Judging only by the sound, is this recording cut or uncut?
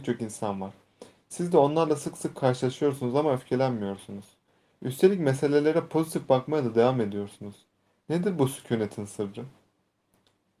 uncut